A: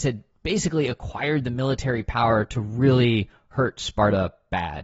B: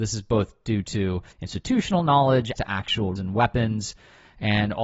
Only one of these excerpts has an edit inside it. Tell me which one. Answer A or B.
B